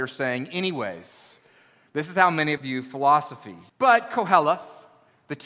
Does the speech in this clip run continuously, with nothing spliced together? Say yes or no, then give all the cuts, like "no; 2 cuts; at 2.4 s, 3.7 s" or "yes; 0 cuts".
no; 2 cuts; at 2.6 s, 3.7 s